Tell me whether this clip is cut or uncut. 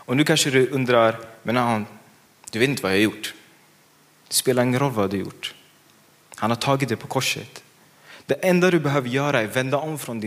uncut